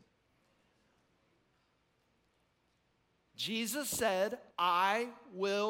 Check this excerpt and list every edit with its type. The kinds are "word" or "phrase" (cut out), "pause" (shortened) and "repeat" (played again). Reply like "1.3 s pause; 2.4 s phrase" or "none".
4.5 s pause